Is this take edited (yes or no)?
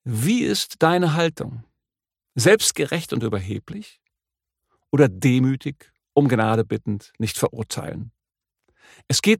no